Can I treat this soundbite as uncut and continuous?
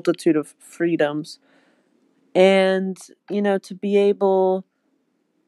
yes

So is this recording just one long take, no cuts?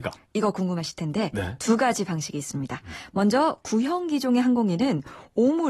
yes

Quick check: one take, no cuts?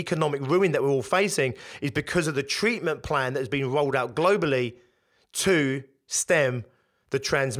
yes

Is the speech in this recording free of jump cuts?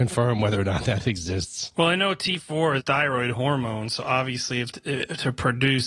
no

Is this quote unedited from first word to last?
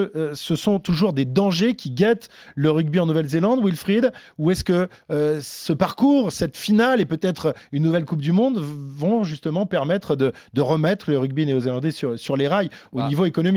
yes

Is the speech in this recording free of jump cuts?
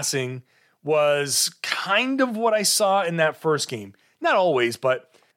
yes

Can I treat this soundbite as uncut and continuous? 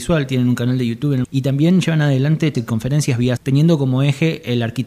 no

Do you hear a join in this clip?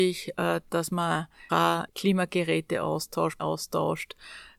yes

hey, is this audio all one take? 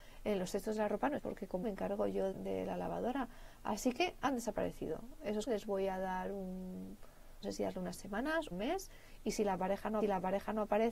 no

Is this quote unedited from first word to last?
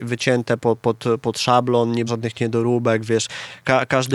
no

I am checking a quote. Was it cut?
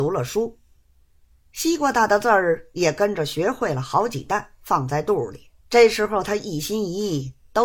yes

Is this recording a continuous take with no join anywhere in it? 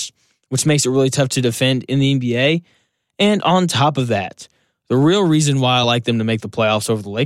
yes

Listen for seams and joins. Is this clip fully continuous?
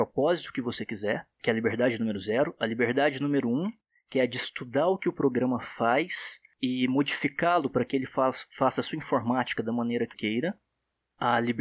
no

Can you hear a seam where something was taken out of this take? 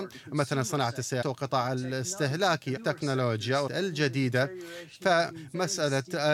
yes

